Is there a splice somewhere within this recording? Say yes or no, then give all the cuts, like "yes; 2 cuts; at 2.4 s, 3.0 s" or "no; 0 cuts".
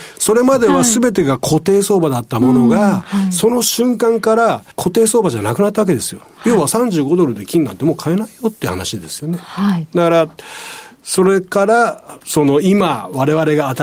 yes; 2 cuts; at 4.7 s, 12.2 s